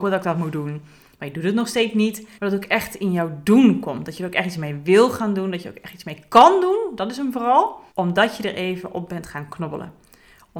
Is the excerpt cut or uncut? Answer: cut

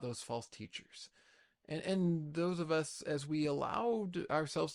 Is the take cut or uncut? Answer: uncut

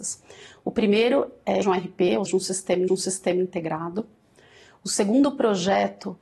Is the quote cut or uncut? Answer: cut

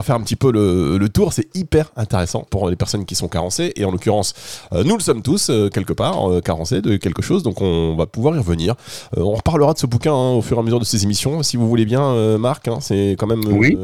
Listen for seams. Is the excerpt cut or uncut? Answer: cut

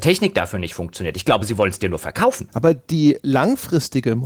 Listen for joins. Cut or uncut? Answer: uncut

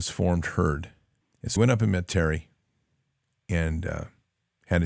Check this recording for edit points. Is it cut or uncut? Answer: cut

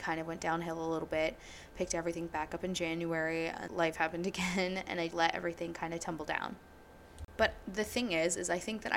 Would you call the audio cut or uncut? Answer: cut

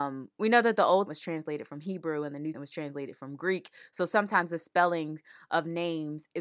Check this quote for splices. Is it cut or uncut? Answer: cut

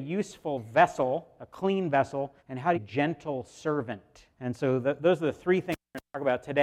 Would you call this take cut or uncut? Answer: cut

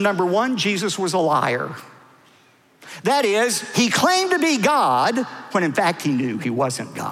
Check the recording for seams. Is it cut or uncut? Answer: uncut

